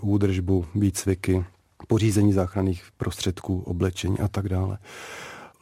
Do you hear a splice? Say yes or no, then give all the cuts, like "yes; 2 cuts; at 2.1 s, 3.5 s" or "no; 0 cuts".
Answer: no; 0 cuts